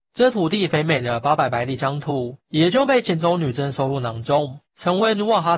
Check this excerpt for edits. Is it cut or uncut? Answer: cut